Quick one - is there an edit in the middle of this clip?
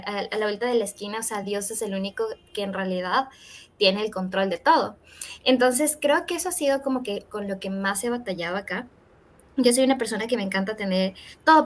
no; 0 cuts

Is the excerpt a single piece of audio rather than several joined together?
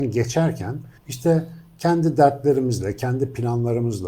no; 1 cut; at 1.0 s

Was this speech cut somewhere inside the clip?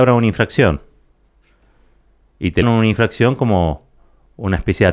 yes; 1 cut; at 2.6 s

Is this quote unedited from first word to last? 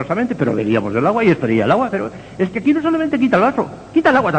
yes; 0 cuts

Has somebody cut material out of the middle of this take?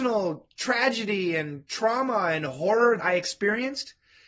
yes; 1 cut; at 3.0 s

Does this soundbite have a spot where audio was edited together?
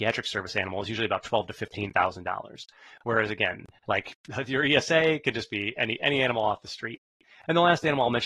no; 0 cuts

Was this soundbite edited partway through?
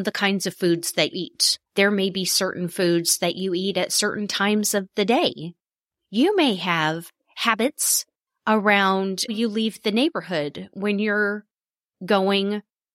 yes; 3 cuts; at 1.1 s, 1.7 s, 9.3 s

